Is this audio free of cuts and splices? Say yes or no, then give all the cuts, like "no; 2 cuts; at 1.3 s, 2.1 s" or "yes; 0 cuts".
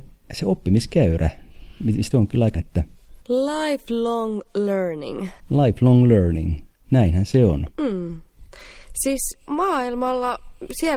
no; 6 cuts; at 2.1 s, 2.5 s, 3.2 s, 5.4 s, 7.7 s, 9.5 s